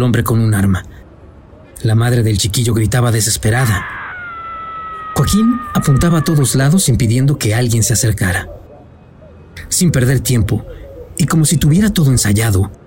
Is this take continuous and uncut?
yes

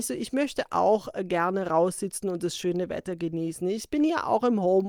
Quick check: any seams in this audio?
no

